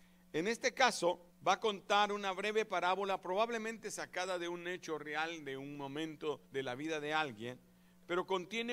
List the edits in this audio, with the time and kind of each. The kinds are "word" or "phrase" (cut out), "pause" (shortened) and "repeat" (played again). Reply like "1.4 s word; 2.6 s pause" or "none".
1.3 s pause; 6.4 s pause